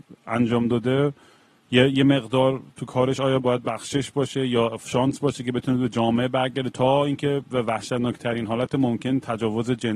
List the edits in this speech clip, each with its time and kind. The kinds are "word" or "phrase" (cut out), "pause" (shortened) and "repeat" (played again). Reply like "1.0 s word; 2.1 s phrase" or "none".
none

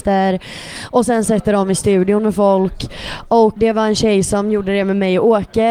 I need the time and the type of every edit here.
3.6 s word

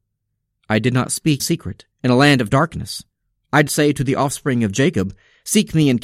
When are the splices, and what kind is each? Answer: 1.4 s word; 1.9 s pause; 3.7 s word

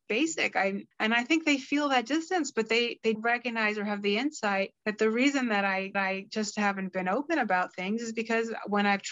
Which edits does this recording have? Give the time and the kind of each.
0.9 s pause; 3.1 s word; 4.8 s pause; 5.9 s repeat

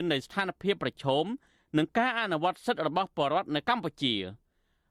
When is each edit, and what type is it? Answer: none

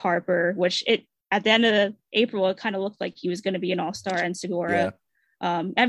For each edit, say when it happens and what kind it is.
none

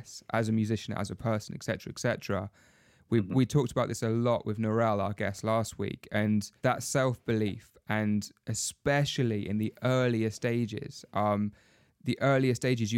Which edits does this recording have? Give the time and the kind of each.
6.6 s pause

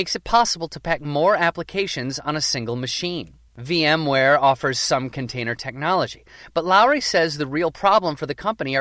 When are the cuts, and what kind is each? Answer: 3.5 s pause

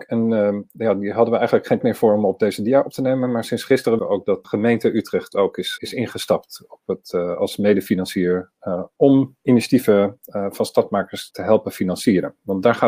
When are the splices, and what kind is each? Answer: 1.8 s word; 4.0 s word; 4.4 s word; 5.8 s word; 11.3 s word

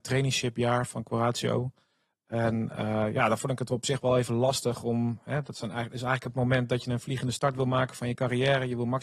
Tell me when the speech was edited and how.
none

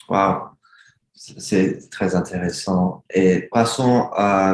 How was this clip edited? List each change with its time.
3.5 s word

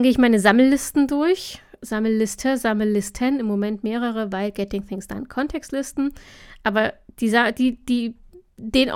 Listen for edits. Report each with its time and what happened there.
none

